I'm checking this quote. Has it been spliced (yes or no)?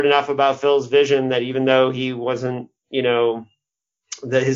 yes